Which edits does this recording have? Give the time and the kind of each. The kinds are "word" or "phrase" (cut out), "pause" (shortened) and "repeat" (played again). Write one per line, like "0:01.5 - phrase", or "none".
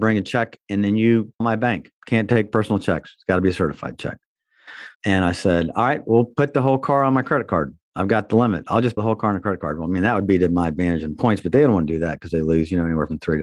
0:01.4 - word
0:02.0 - pause
0:04.9 - pause
0:09.0 - word